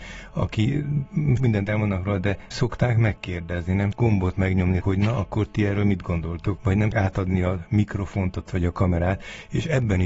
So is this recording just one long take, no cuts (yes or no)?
no